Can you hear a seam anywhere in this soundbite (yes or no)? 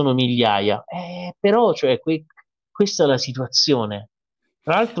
no